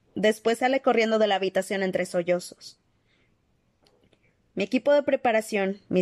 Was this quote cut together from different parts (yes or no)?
no